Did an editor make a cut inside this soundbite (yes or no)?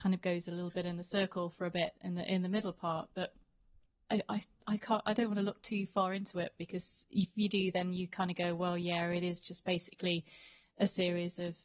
no